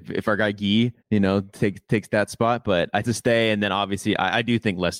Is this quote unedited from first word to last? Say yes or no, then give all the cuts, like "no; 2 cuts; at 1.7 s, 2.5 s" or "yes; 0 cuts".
no; 2 cuts; at 1.0 s, 3.0 s